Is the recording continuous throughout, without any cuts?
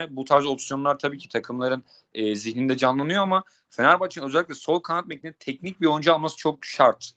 yes; 0 cuts

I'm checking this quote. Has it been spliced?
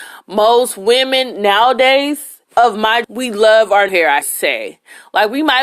yes; 4 cuts; at 2.5 s, 3.0 s, 3.9 s, 4.2 s

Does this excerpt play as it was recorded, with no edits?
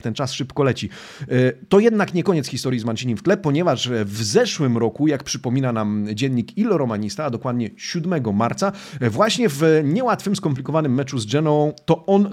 yes; 0 cuts

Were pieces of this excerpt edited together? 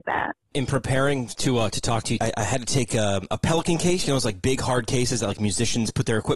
yes; 1 cut; at 2.2 s

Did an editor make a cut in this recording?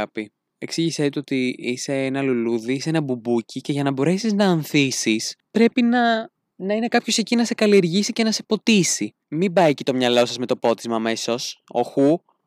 yes; 1 cut; at 9.2 s

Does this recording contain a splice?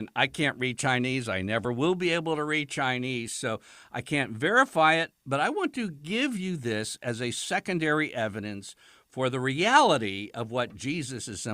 no; 0 cuts

